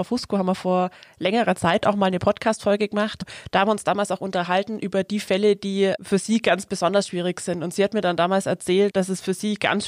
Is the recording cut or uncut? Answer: uncut